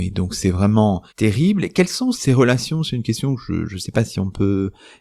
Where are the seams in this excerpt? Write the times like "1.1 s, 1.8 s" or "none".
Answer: 1.1 s, 2.1 s